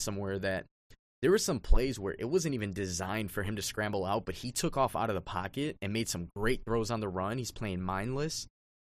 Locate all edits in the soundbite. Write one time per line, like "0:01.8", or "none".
none

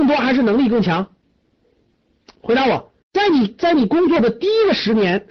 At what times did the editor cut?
0:03.0

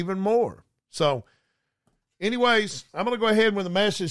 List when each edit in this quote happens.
0:02.9

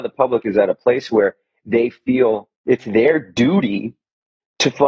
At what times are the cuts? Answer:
0:02.6

